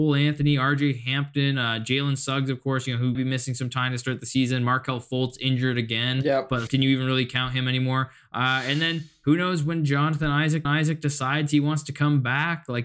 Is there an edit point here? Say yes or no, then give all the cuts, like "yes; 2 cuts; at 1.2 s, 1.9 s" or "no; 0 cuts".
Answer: yes; 3 cuts; at 3.1 s, 6.7 s, 10.6 s